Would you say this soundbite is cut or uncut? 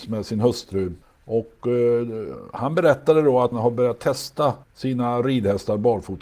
cut